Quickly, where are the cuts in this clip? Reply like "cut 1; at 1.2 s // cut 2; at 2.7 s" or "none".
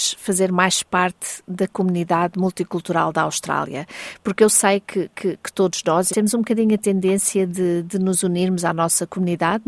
cut 1; at 5.1 s // cut 2; at 6.1 s